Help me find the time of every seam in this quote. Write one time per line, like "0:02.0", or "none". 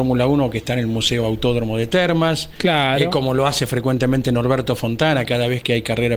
none